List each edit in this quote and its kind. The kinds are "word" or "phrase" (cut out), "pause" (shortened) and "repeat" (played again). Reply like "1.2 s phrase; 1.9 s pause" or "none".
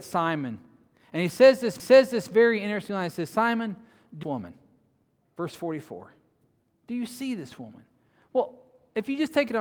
1.8 s repeat; 4.2 s phrase